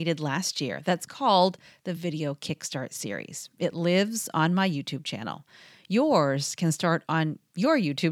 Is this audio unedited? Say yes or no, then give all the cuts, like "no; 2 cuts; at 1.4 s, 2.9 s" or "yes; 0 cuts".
yes; 0 cuts